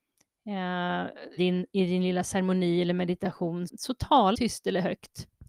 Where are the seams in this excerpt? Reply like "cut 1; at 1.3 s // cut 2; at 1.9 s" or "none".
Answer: cut 1; at 1.4 s // cut 2; at 3.7 s // cut 3; at 4.3 s